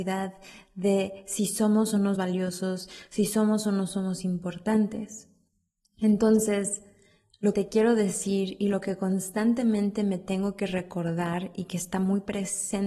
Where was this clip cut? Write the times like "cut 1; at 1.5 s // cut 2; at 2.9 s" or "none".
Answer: cut 1; at 2.2 s // cut 2; at 7.5 s